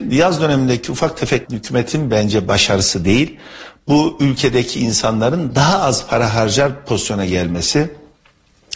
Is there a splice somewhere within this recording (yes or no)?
yes